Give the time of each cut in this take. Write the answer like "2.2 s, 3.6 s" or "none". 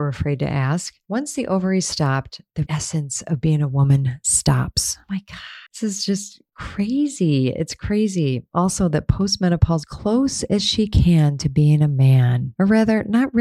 2.7 s, 5.7 s, 9.8 s